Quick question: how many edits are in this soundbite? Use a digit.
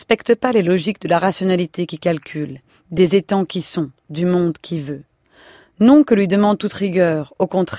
0